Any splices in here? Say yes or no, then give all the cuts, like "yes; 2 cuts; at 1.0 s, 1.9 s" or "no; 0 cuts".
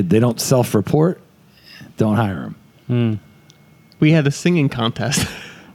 no; 0 cuts